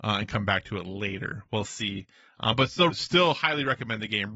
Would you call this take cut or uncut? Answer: cut